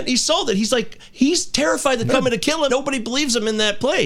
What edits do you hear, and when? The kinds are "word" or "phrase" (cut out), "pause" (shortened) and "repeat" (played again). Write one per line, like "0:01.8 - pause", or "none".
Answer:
0:02.1 - word
0:02.7 - word